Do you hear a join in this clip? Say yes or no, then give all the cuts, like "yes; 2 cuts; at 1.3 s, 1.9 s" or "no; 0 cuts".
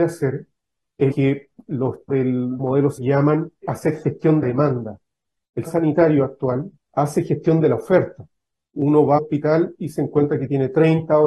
yes; 9 cuts; at 1.1 s, 2.1 s, 2.6 s, 3.0 s, 3.6 s, 4.4 s, 5.7 s, 6.8 s, 9.2 s